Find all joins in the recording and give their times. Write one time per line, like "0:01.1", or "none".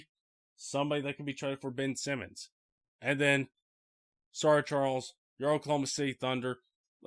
none

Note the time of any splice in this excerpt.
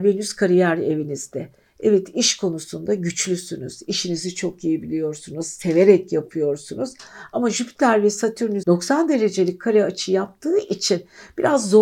0:08.6

